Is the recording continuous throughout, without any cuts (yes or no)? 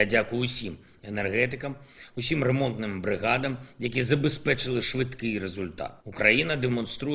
no